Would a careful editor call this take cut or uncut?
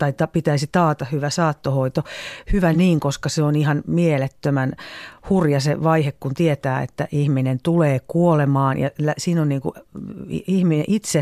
uncut